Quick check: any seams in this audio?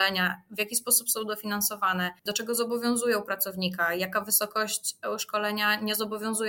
yes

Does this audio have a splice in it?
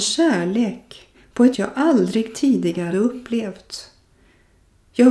yes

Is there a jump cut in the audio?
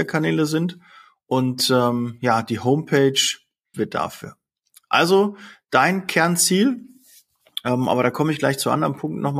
yes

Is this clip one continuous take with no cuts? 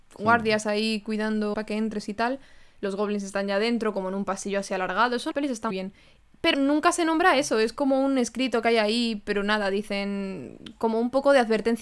no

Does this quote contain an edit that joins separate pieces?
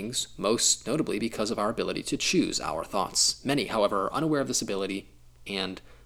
no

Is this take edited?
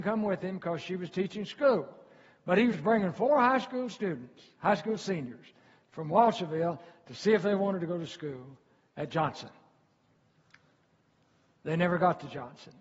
no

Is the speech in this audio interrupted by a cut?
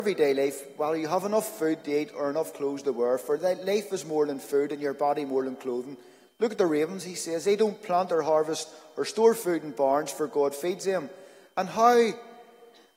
no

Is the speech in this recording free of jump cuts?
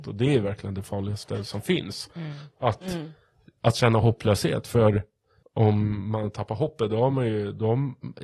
yes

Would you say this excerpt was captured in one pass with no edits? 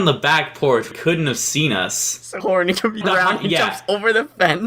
no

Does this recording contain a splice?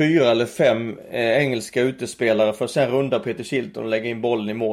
no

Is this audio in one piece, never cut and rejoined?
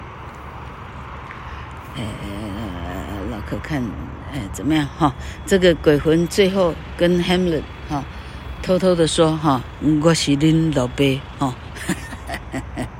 yes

